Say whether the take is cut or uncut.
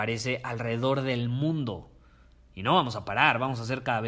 uncut